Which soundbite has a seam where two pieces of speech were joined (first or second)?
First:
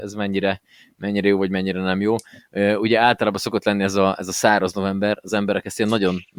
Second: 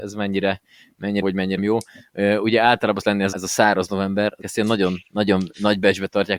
second